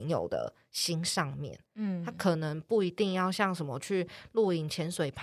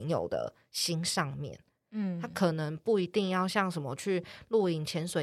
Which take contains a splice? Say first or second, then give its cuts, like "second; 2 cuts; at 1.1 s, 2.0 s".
first; 1 cut; at 1.6 s